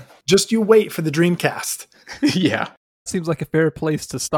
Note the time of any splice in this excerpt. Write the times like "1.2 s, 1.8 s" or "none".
3.1 s